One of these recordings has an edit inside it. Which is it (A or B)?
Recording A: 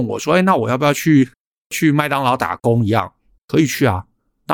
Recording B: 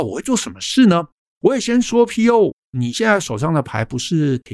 A